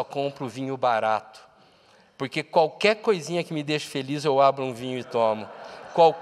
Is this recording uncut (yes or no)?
yes